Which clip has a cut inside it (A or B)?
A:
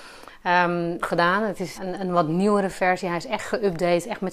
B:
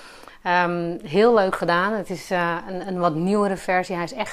A